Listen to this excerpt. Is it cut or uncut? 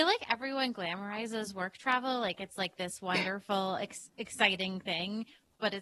uncut